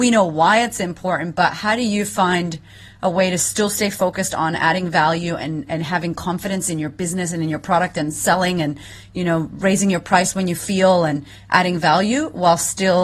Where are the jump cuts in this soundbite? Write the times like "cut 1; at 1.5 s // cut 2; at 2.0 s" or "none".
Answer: none